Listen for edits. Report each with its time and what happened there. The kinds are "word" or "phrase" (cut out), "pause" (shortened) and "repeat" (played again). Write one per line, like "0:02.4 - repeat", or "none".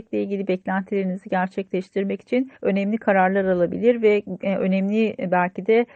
0:02.6 - pause